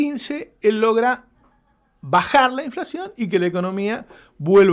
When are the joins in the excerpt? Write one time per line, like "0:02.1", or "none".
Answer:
none